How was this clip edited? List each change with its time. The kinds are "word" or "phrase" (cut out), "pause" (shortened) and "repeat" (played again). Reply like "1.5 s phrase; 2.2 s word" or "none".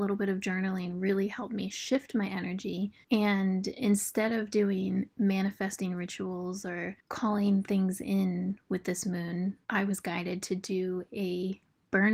3.0 s pause; 9.6 s pause